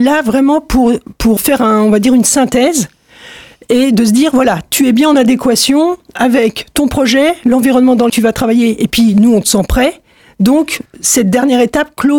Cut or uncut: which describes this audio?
cut